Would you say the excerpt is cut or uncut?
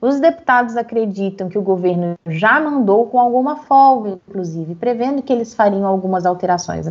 uncut